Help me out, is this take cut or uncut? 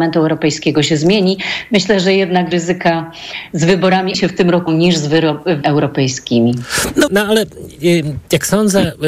cut